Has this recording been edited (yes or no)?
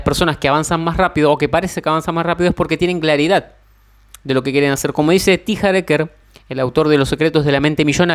no